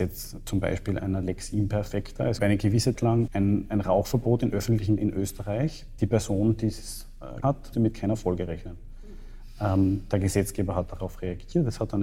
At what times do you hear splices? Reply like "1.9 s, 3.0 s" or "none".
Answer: 1.0 s, 2.4 s, 3.0 s, 3.3 s, 5.0 s, 6.0 s, 7.4 s, 7.7 s